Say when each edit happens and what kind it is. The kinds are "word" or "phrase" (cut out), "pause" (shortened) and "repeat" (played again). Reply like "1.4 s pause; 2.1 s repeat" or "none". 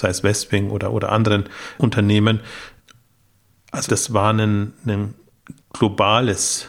3.9 s word; 5.6 s pause